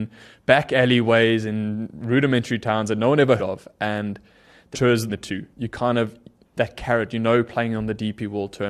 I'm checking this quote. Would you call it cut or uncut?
cut